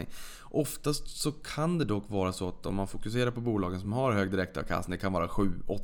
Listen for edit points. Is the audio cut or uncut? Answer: uncut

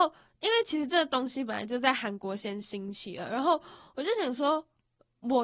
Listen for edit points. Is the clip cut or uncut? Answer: uncut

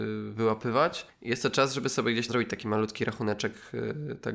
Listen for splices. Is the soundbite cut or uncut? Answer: cut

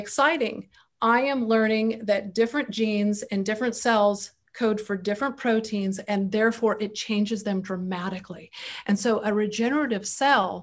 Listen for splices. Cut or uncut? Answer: uncut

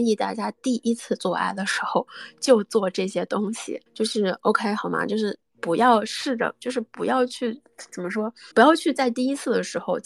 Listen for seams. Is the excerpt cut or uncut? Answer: cut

